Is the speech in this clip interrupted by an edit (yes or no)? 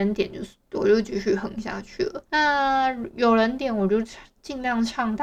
yes